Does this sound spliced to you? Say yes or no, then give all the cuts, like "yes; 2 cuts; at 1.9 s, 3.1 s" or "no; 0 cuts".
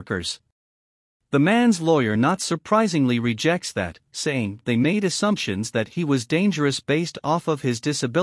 no; 0 cuts